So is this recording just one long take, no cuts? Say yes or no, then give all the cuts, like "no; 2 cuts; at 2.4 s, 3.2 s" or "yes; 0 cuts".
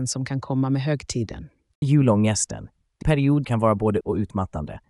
no; 4 cuts; at 1.8 s, 3.0 s, 3.4 s, 4.0 s